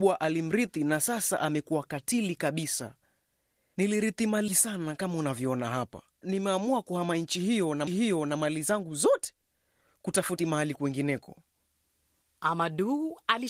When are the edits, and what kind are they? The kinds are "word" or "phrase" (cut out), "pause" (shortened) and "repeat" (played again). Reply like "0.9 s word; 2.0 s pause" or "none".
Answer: 4.5 s word; 6.2 s word; 7.9 s repeat; 10.4 s word